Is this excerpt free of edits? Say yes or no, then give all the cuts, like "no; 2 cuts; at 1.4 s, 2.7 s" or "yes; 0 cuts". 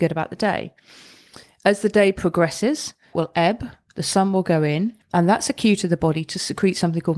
no; 2 cuts; at 3.1 s, 5.0 s